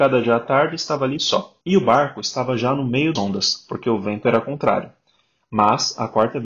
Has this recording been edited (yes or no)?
yes